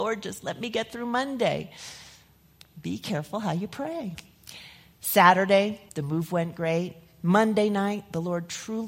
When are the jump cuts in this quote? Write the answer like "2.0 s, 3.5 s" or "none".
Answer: 5.9 s

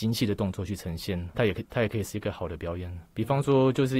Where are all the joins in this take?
1.3 s, 3.1 s

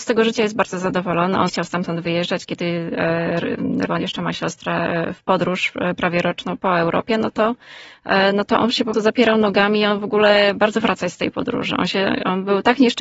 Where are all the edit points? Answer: 1.5 s, 3.9 s, 6.6 s, 8.9 s, 10.8 s

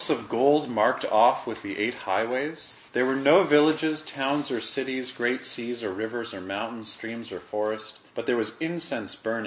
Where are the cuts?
2.9 s, 8.1 s

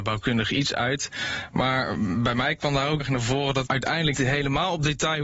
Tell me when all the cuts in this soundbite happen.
3.0 s, 3.6 s, 4.1 s

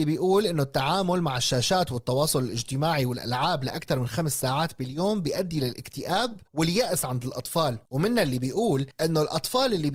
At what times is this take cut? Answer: 6.5 s, 7.9 s

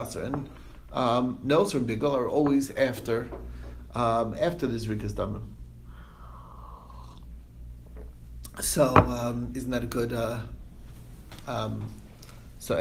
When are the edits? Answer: none

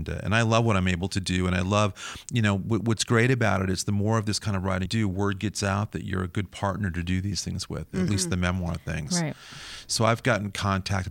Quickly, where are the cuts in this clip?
4.9 s

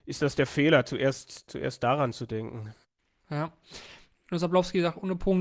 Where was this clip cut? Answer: 2.8 s

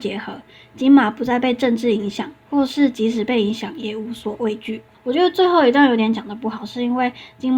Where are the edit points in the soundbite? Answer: 2.4 s

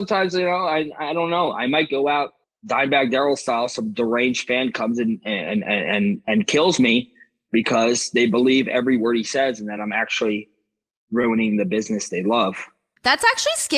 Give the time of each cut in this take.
none

